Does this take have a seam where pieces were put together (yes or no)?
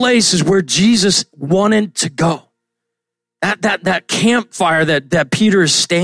no